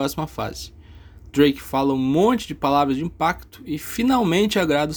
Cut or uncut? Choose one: uncut